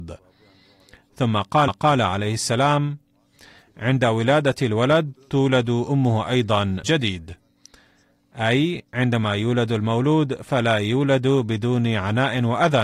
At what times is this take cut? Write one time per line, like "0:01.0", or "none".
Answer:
0:01.7
0:06.8
0:08.9